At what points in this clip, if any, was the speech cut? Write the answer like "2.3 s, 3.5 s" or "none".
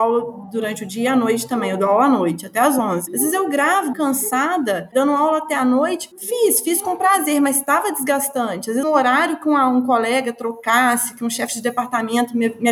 3.9 s, 8.8 s